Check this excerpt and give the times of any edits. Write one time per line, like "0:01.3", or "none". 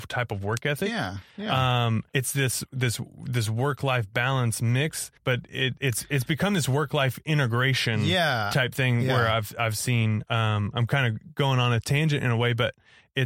0:02.1
0:05.2